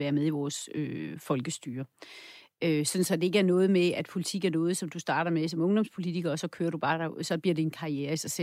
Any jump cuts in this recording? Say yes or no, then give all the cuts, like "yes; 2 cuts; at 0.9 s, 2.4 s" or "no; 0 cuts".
no; 0 cuts